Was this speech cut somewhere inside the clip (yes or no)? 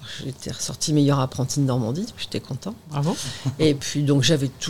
no